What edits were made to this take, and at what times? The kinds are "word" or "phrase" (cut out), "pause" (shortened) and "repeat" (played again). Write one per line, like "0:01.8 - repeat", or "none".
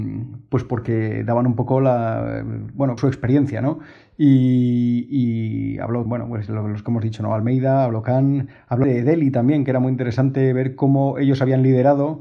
0:03.0 - phrase
0:06.1 - word
0:08.8 - phrase